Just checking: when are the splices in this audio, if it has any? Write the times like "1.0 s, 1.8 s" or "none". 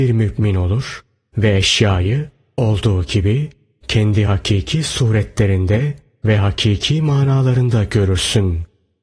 none

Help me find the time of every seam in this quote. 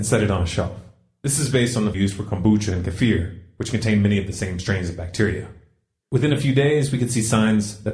1.9 s

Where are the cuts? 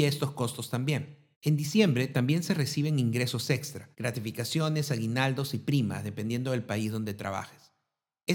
1.3 s, 3.9 s

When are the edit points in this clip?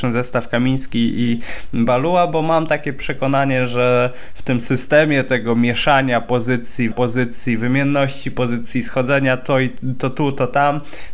6.9 s

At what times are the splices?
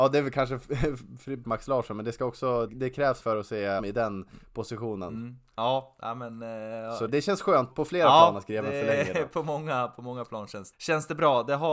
1.4 s, 2.7 s, 3.2 s, 3.8 s, 7.1 s, 7.7 s, 10.7 s

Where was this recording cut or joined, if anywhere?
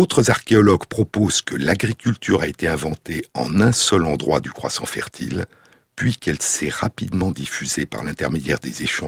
5.7 s

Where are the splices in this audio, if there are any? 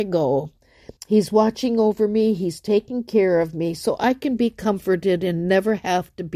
1.0 s

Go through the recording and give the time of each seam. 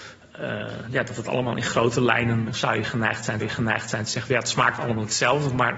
2.5 s, 3.4 s

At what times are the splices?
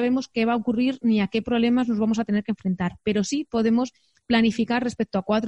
none

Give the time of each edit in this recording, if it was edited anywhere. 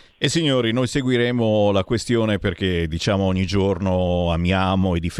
none

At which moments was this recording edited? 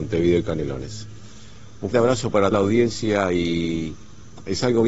1.9 s, 2.5 s

